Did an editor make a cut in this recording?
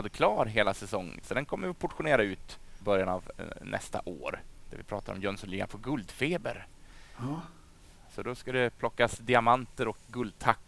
yes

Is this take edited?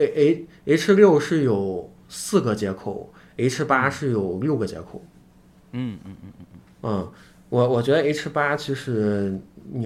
no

